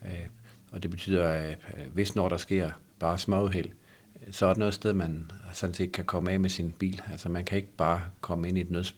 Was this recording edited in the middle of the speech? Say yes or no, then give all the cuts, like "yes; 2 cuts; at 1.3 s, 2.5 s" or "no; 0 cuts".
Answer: yes; 2 cuts; at 2.9 s, 4.5 s